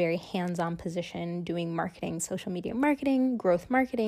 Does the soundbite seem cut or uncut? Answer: uncut